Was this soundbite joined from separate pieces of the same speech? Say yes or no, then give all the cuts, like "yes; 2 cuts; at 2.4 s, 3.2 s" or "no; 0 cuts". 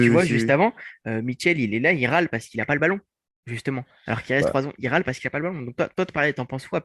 no; 0 cuts